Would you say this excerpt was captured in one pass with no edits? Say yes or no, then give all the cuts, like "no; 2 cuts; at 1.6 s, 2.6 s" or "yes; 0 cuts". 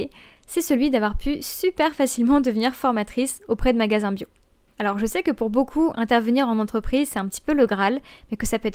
yes; 0 cuts